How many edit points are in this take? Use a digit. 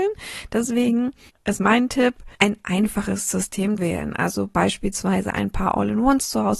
3